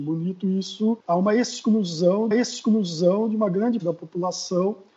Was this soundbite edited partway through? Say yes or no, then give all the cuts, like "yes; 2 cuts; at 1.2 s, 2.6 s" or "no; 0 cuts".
yes; 3 cuts; at 1.0 s, 2.3 s, 3.8 s